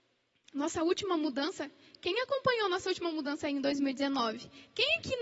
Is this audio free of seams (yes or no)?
yes